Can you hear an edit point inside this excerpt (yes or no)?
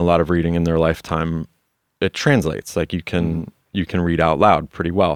no